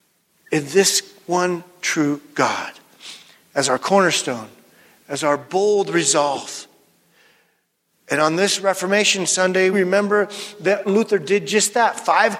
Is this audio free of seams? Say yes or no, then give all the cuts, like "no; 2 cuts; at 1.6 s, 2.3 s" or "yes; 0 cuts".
no; 2 cuts; at 9.7 s, 10.9 s